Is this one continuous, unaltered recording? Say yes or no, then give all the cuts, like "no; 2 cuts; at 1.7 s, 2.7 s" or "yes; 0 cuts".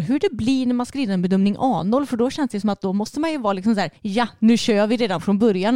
no; 1 cut; at 4.0 s